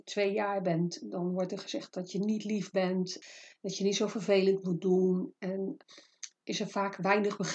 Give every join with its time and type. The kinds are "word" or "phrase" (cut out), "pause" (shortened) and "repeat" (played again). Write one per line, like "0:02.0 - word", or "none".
none